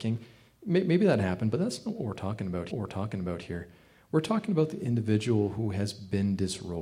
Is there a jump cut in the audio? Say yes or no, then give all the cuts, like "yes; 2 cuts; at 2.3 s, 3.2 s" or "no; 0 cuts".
yes; 1 cut; at 2.7 s